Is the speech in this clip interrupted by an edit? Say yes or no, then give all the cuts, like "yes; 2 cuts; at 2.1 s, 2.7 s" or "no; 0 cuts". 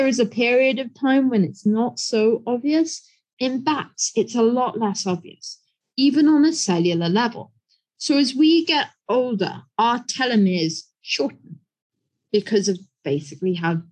no; 0 cuts